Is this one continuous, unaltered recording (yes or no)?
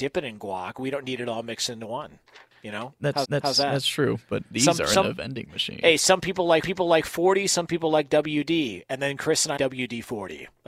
no